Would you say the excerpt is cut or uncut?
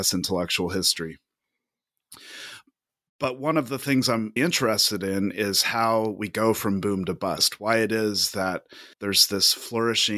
cut